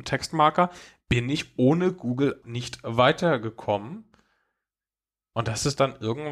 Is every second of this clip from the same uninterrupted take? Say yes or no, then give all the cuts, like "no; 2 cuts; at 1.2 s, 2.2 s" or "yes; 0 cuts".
no; 1 cut; at 2.4 s